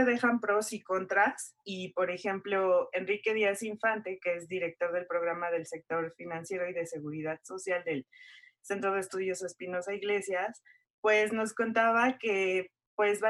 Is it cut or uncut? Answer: uncut